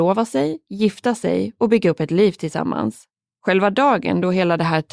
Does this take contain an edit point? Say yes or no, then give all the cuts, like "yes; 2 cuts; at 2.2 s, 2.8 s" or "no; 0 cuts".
yes; 1 cut; at 3.2 s